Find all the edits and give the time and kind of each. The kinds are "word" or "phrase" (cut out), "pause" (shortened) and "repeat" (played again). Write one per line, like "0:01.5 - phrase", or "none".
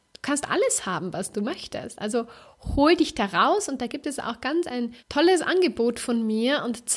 0:05.0 - pause